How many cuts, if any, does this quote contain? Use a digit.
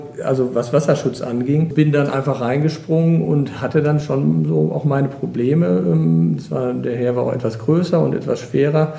0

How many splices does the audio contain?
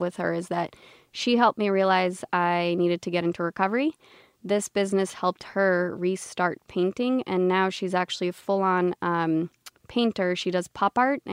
0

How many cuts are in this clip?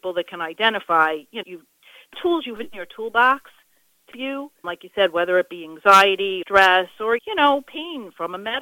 7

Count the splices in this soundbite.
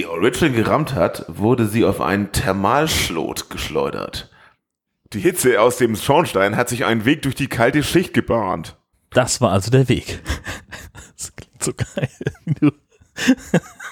1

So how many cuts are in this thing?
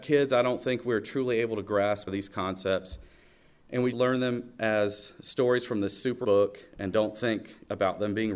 3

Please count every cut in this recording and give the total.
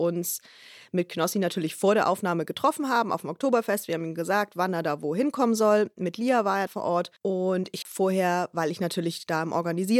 3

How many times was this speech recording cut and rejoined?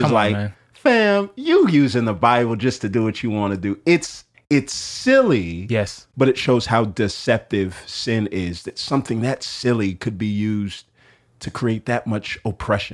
1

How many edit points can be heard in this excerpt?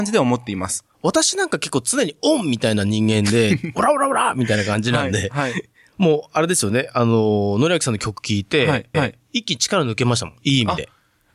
2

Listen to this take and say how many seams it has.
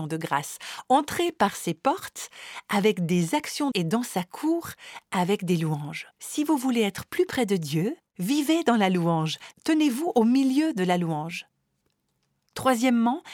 3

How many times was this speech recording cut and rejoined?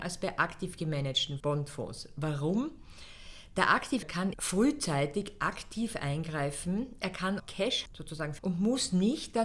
6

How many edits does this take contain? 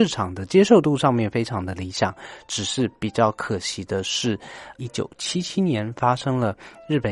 1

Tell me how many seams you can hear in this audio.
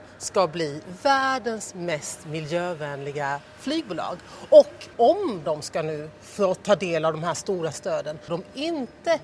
3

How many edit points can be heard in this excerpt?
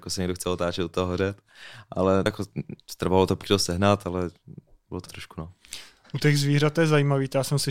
3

